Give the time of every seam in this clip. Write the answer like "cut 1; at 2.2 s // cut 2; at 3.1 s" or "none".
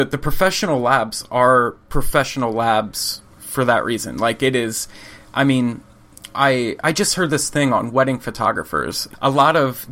cut 1; at 3.3 s

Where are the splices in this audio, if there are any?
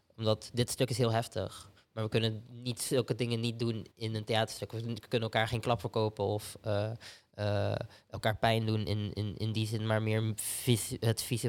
cut 1; at 3.9 s

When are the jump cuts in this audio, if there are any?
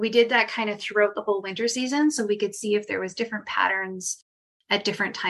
none

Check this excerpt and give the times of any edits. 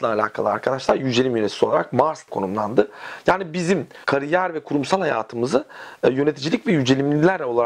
cut 1; at 2.3 s // cut 2; at 4.0 s

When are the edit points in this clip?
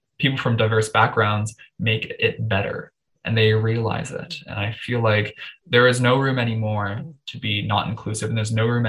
none

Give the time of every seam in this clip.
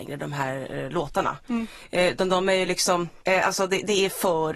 none

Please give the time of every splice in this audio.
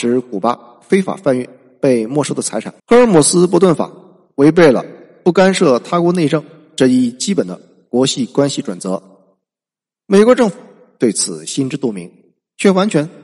cut 1; at 2.8 s

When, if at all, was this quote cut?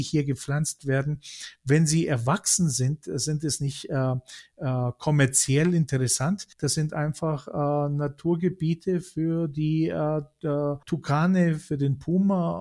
cut 1; at 6.5 s // cut 2; at 10.8 s

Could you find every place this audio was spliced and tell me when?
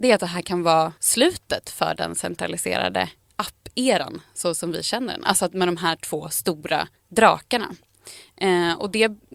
cut 1; at 1.0 s // cut 2; at 3.2 s // cut 3; at 7.0 s

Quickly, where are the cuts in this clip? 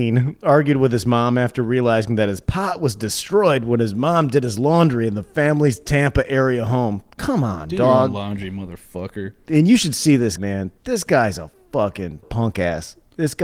cut 1; at 10.4 s // cut 2; at 12.2 s

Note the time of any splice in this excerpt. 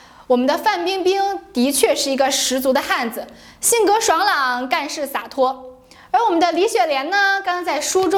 none

